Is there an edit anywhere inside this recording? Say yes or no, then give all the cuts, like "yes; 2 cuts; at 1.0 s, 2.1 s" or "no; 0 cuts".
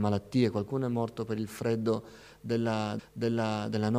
yes; 1 cut; at 3.0 s